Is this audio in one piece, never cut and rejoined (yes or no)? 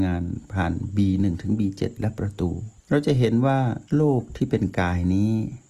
no